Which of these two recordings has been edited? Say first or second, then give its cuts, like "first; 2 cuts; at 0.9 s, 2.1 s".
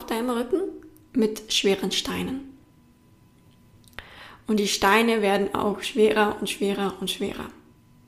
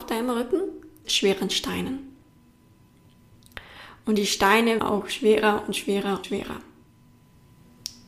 second; 3 cuts; at 1.0 s, 4.8 s, 6.2 s